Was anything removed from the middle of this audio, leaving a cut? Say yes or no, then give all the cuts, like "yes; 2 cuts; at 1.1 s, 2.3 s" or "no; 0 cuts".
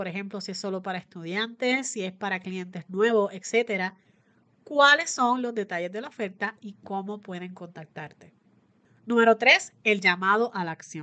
no; 0 cuts